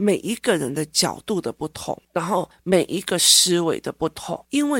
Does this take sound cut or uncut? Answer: cut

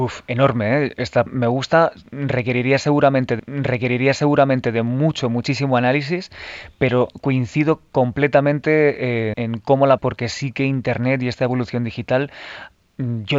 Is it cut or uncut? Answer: cut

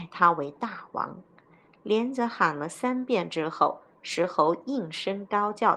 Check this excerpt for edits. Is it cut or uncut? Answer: uncut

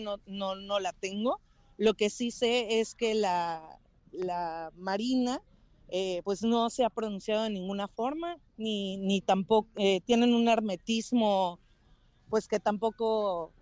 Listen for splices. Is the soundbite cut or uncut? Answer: uncut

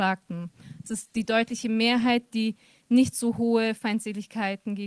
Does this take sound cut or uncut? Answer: uncut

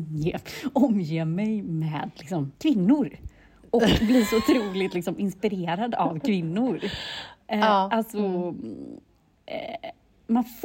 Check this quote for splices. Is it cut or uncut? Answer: cut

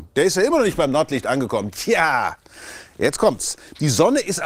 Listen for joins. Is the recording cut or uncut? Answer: uncut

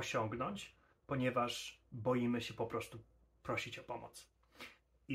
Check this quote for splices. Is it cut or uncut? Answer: uncut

